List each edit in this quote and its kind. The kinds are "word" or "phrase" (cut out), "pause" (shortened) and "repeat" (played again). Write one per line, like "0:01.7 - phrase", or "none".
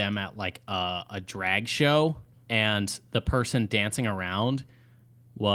0:02.3 - pause